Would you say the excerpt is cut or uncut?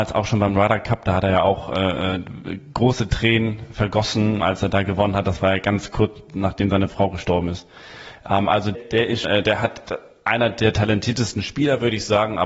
cut